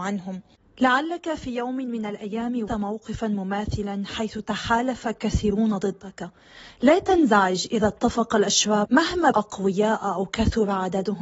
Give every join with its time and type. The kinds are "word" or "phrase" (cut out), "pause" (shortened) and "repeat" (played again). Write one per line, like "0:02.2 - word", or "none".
0:02.7 - word
0:08.8 - word
0:09.3 - word